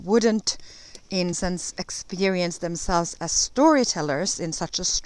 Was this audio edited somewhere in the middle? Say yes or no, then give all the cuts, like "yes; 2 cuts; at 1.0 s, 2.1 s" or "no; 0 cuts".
yes; 1 cut; at 1.3 s